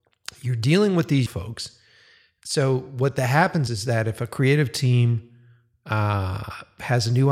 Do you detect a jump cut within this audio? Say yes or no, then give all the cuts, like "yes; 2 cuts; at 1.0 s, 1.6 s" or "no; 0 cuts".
yes; 2 cuts; at 1.3 s, 3.7 s